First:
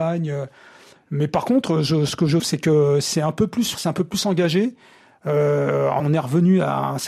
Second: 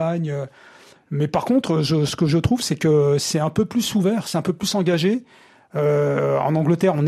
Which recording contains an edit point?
first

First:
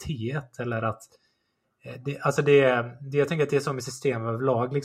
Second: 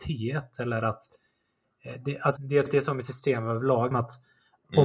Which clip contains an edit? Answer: second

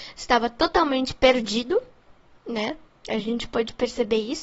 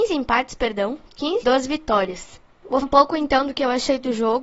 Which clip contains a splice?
second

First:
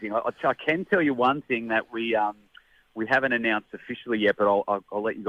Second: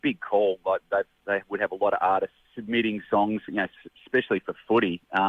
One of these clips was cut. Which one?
second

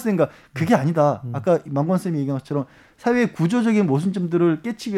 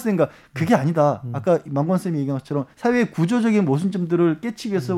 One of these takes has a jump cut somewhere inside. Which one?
second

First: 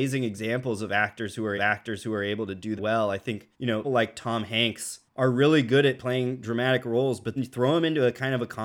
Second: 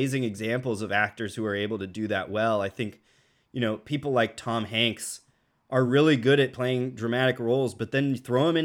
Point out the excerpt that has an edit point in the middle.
first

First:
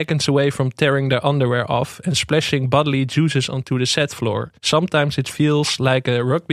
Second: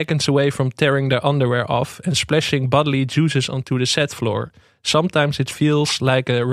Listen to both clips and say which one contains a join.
first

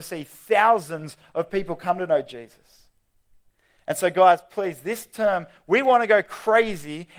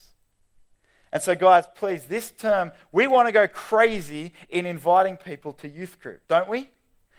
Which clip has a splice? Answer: second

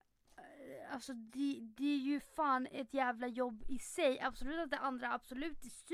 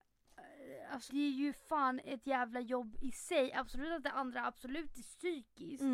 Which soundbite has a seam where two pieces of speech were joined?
second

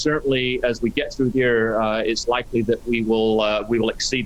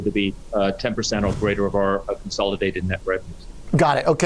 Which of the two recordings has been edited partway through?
first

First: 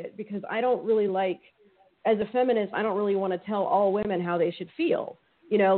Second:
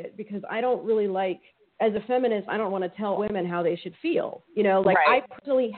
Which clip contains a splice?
second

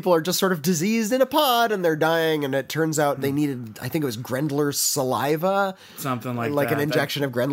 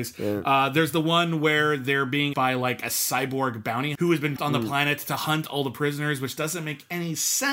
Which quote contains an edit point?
second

